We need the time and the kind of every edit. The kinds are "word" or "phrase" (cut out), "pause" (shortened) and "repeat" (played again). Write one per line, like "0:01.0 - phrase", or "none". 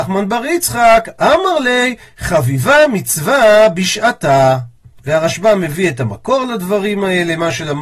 none